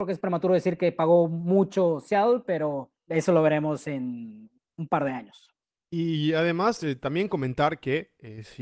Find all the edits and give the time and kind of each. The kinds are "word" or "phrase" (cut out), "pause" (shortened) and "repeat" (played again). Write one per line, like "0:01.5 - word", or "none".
0:03.0 - pause

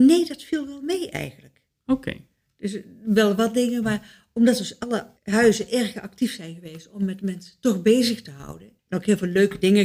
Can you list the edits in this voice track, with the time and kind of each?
0:05.2 - pause
0:08.8 - pause

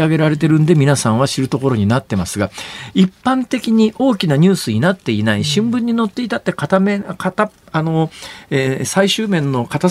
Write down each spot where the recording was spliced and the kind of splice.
none

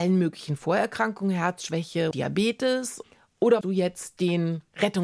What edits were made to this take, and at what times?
0:02.1 - word
0:03.6 - word

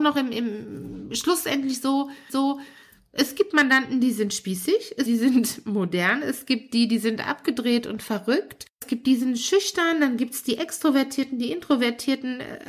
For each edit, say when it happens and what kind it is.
0:02.3 - repeat
0:05.1 - phrase
0:08.7 - pause

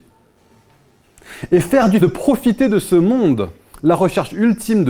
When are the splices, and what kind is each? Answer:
0:02.0 - word

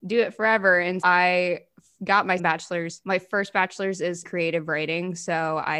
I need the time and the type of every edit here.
0:01.0 - word
0:02.4 - word
0:04.2 - word

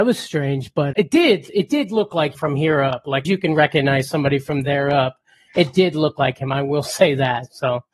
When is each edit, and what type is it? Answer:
0:00.9 - word
0:02.3 - word
0:03.2 - phrase

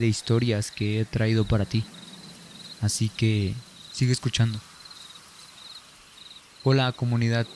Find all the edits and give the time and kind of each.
none

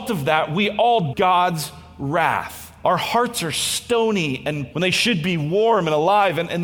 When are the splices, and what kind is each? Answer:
0:01.1 - word
0:04.7 - word

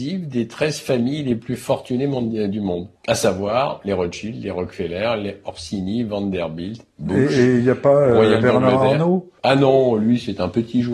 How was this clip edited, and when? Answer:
0:03.0 - pause
0:09.4 - pause

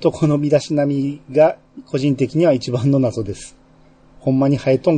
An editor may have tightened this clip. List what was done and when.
none

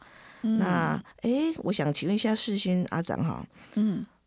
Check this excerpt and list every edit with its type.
0:01.1 - pause

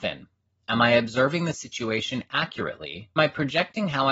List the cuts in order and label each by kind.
0:03.2 - phrase

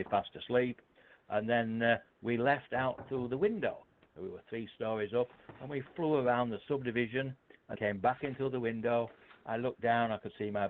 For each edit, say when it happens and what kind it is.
0:07.8 - word

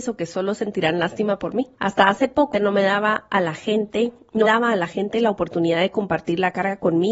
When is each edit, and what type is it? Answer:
0:01.7 - pause
0:02.5 - word
0:04.4 - word

